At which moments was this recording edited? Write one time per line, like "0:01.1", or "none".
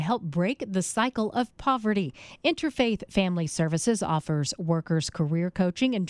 none